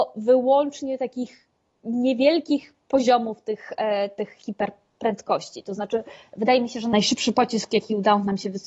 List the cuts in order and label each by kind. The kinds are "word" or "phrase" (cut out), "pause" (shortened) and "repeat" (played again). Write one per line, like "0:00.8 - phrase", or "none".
none